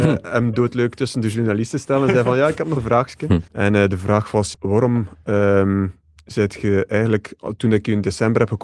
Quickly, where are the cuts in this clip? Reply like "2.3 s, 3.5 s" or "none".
2.8 s, 3.5 s, 4.5 s